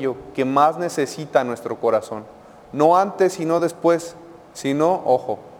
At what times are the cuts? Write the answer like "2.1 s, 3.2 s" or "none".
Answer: none